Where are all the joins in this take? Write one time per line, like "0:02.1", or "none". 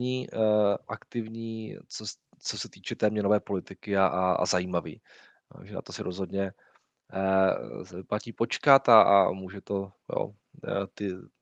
0:10.0